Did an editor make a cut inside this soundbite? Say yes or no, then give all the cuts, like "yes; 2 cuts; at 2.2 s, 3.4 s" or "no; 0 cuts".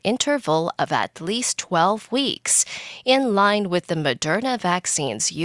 no; 0 cuts